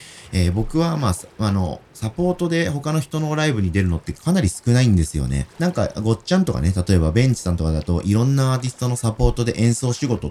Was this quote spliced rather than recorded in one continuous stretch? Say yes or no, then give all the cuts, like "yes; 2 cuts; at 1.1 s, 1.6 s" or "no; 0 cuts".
yes; 1 cut; at 5.5 s